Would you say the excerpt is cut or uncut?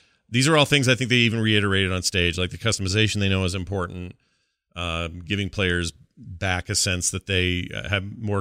uncut